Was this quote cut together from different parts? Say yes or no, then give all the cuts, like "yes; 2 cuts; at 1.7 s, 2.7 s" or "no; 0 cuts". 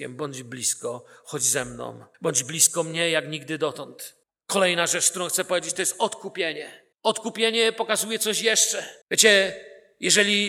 yes; 4 cuts; at 2.1 s, 4.2 s, 6.9 s, 9.0 s